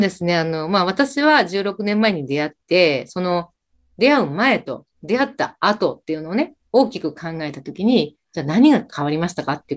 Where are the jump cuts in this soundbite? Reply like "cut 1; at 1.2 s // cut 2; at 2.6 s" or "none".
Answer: none